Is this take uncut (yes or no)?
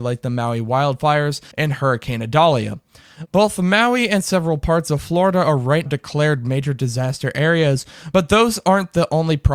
no